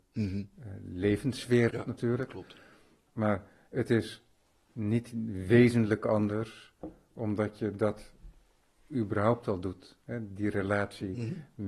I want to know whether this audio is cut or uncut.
cut